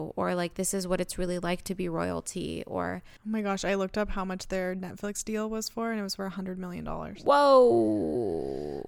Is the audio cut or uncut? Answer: uncut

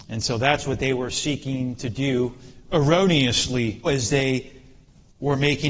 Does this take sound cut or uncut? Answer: cut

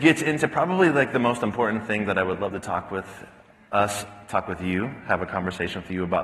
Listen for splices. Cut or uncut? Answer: uncut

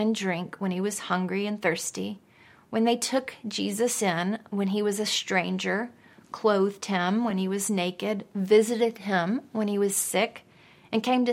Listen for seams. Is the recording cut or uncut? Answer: uncut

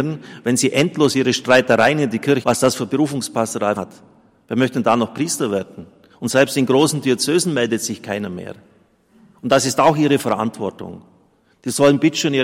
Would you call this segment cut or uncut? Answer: cut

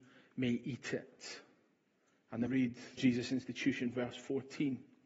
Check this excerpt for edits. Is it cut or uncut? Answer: cut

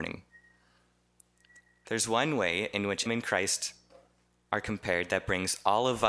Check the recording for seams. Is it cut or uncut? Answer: cut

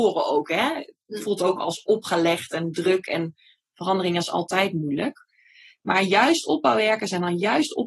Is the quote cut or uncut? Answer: uncut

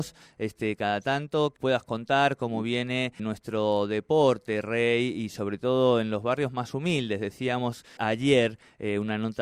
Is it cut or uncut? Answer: cut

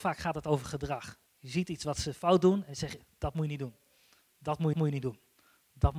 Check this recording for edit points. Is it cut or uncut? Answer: cut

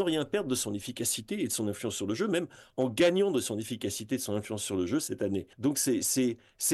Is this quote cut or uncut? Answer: cut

